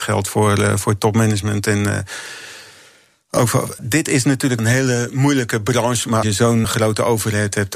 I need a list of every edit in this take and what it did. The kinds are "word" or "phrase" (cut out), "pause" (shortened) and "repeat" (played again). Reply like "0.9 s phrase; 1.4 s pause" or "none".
3.8 s word; 4.6 s word; 6.2 s word; 6.6 s word